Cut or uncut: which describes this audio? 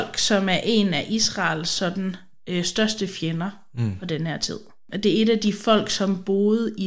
uncut